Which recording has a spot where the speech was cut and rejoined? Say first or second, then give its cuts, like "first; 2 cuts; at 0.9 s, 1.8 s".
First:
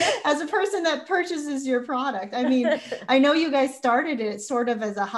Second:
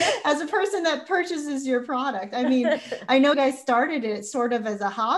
second; 1 cut; at 3.3 s